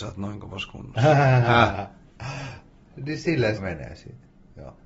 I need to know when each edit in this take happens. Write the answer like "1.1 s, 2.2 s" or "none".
3.6 s